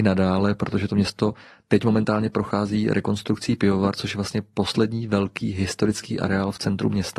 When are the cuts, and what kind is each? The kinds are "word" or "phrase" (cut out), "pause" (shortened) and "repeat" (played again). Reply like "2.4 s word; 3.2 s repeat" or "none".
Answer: none

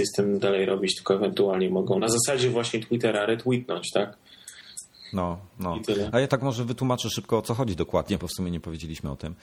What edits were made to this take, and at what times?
6.3 s word

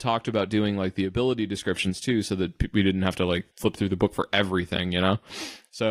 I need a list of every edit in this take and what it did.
3.5 s pause

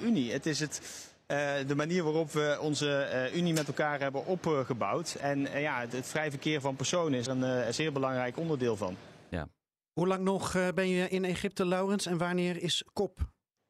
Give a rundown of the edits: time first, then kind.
7.3 s word

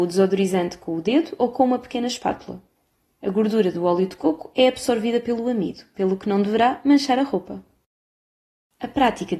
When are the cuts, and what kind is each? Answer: none

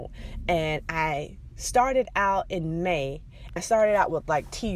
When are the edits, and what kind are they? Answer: 3.6 s word

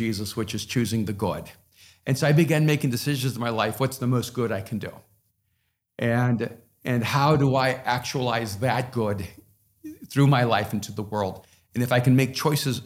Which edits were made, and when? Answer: none

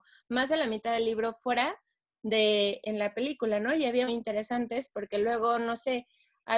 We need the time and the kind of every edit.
2.8 s word; 4.1 s phrase

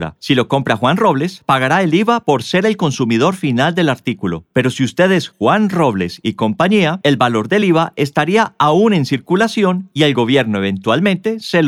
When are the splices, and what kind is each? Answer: none

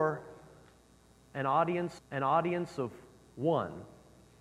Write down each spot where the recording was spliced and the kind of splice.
2.0 s repeat

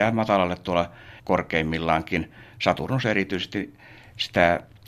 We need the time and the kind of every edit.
1.2 s word

